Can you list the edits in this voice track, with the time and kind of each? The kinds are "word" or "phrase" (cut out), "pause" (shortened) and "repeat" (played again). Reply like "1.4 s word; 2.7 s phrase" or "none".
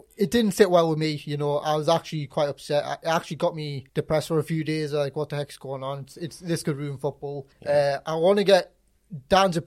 3.9 s pause; 7.5 s pause